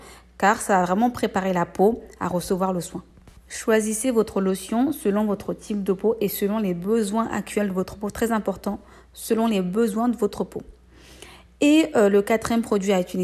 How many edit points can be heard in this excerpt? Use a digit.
0